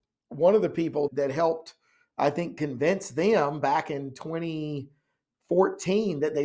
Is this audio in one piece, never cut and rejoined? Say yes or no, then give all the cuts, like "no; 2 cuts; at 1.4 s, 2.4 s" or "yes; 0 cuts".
yes; 0 cuts